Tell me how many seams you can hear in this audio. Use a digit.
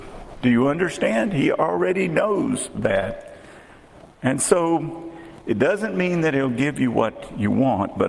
1